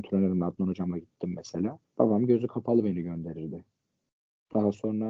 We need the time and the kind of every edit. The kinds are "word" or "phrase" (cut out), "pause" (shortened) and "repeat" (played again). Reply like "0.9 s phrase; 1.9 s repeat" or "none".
1.9 s pause